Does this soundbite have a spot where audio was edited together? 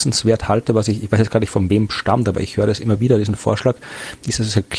no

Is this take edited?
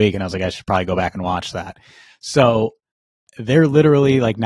no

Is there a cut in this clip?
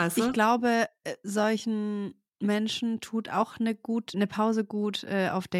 yes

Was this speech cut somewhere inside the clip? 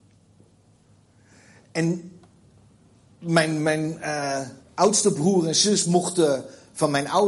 yes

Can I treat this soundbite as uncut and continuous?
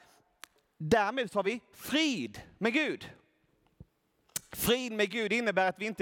yes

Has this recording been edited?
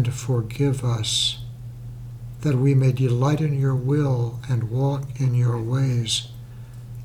no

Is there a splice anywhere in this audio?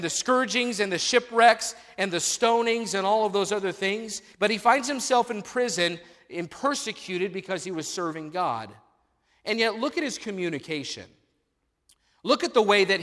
yes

